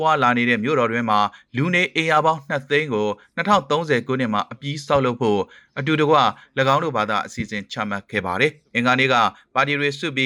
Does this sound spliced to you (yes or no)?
no